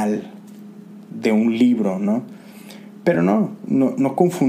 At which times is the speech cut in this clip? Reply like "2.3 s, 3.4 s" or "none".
none